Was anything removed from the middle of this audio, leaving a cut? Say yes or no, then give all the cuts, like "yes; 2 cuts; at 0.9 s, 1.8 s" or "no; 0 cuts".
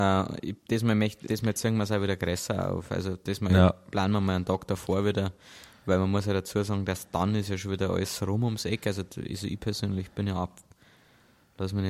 yes; 1 cut; at 1.3 s